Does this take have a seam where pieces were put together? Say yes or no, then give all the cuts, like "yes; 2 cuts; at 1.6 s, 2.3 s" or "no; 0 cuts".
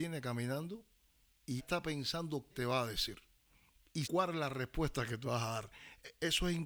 yes; 4 cuts; at 1.6 s, 2.5 s, 4.0 s, 5.3 s